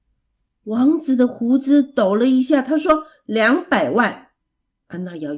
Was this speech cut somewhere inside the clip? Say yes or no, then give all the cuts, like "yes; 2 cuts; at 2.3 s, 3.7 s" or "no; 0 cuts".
no; 0 cuts